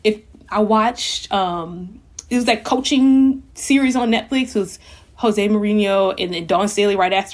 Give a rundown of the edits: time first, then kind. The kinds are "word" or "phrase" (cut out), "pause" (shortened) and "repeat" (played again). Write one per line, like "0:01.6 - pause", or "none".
0:03.5 - pause